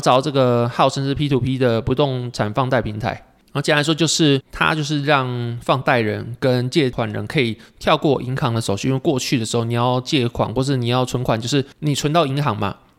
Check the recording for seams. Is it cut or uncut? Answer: cut